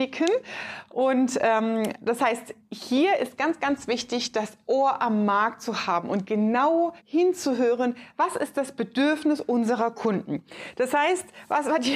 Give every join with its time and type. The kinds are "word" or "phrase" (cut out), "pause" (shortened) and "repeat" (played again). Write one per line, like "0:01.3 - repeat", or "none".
0:07.0 - pause

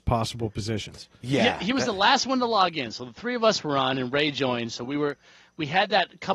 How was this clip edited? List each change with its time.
none

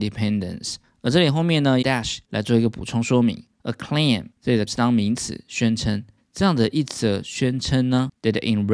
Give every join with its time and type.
0:01.8 - phrase
0:02.2 - pause
0:03.5 - pause
0:04.3 - pause
0:04.7 - word
0:06.2 - pause

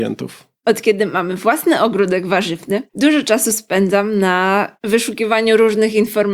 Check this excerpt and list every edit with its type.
none

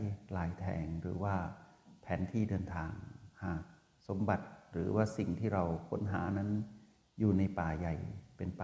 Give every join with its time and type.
none

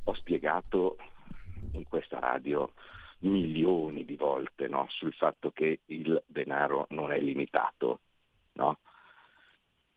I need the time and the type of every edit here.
none

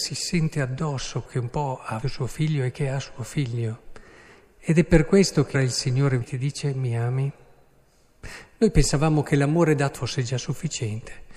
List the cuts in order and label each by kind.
0:01.3 - word
0:02.0 - word
0:05.5 - word
0:06.2 - word
0:09.9 - word

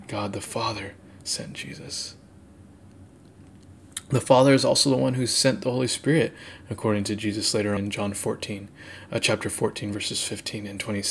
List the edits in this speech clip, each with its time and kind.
0:07.8 - word

